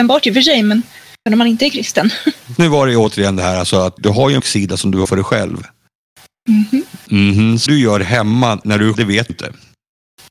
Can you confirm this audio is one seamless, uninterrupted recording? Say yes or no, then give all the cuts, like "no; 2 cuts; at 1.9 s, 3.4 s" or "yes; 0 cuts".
no; 9 cuts; at 1.3 s, 2.6 s, 4.0 s, 4.4 s, 5.1 s, 7.7 s, 8.6 s, 8.9 s, 9.3 s